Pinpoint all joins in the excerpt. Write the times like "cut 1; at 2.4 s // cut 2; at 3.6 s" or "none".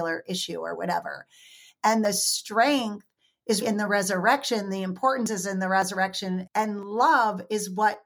cut 1; at 3.6 s // cut 2; at 6.5 s